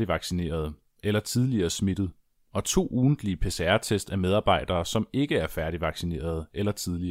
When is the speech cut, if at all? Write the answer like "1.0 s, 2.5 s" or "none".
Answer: none